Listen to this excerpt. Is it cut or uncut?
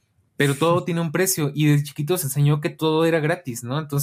cut